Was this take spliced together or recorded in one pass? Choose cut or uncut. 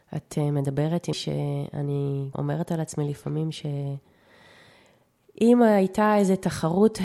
cut